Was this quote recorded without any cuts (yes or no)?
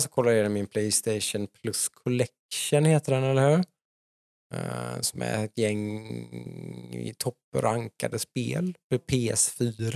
yes